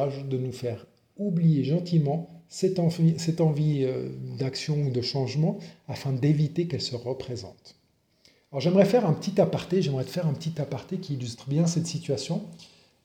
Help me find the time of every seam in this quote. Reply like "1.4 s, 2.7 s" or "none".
none